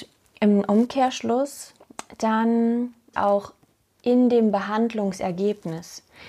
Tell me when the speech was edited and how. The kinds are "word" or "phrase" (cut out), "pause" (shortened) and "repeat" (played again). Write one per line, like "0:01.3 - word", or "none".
0:03.1 - phrase

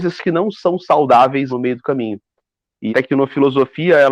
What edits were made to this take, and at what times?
0:01.5 - word
0:02.9 - word

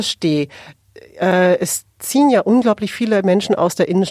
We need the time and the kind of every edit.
none

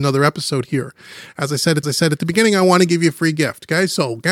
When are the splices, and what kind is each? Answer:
0:01.8 - repeat

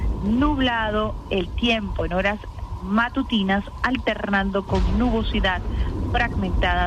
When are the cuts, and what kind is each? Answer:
none

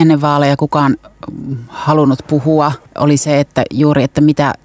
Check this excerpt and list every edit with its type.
0:02.9 - pause

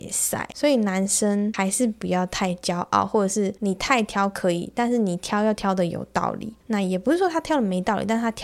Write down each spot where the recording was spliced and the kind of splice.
0:03.6 - pause
0:06.6 - pause

